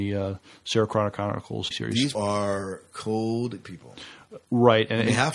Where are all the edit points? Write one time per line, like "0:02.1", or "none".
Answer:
0:01.7
0:02.1
0:03.6